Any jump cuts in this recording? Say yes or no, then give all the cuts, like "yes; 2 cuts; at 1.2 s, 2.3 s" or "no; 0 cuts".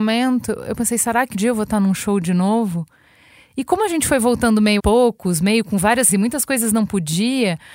yes; 3 cuts; at 1.3 s, 4.8 s, 6.1 s